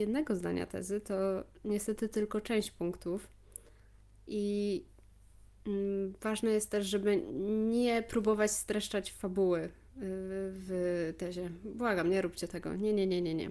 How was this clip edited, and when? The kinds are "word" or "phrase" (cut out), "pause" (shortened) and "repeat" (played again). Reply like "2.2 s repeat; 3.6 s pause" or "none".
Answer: none